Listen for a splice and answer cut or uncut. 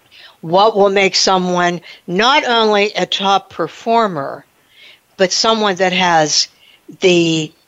uncut